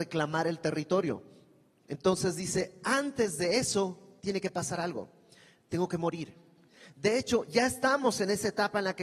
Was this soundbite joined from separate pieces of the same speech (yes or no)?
no